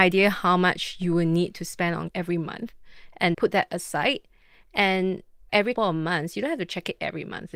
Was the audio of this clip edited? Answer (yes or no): yes